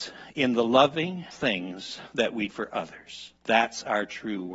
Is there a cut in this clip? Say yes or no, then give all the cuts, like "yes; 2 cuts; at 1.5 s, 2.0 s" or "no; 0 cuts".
yes; 3 cuts; at 1.3 s, 2.5 s, 3.4 s